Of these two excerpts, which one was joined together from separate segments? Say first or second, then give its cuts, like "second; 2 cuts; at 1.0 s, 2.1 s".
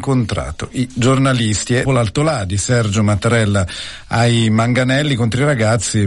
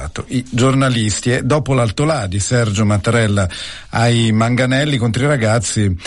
first; 1 cut; at 1.8 s